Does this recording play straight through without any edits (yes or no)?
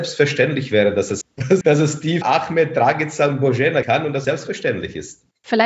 no